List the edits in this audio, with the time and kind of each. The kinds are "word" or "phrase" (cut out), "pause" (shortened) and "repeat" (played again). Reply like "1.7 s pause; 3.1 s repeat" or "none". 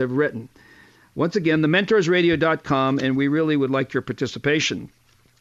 none